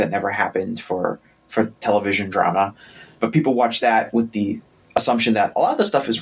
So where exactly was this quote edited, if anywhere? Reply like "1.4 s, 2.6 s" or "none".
none